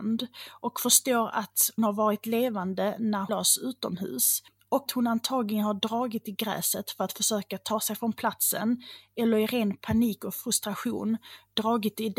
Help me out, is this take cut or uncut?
cut